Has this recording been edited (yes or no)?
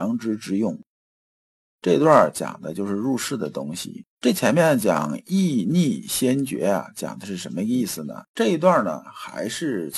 yes